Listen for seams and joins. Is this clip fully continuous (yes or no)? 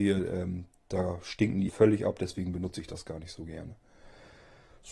no